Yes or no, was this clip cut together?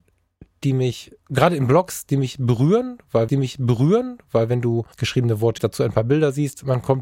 yes